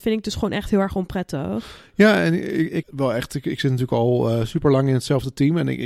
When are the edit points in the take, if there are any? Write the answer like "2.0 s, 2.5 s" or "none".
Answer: 2.8 s